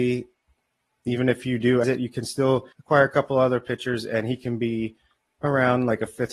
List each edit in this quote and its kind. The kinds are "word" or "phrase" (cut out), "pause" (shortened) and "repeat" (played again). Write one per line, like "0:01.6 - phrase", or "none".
0:01.8 - word
0:02.7 - pause